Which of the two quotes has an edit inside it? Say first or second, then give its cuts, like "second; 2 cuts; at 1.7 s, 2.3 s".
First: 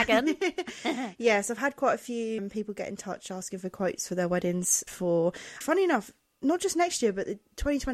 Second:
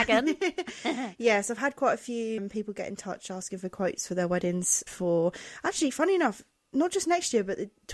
first; 1 cut; at 5.6 s